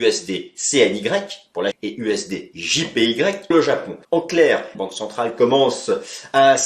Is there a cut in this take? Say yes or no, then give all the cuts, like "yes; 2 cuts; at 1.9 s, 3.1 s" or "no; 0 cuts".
yes; 4 cuts; at 1.7 s, 3.5 s, 4.0 s, 4.7 s